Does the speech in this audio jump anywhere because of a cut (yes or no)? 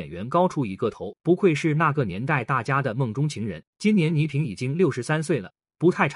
yes